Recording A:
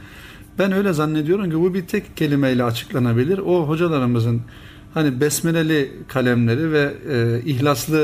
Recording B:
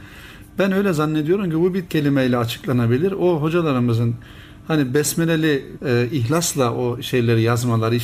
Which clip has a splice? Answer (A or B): B